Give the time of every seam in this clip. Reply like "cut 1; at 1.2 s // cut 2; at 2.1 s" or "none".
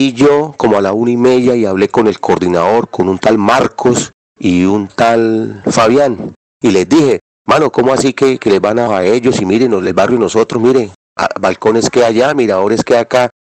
cut 1; at 8.9 s